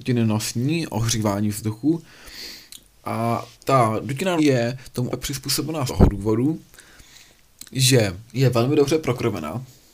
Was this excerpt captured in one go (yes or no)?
no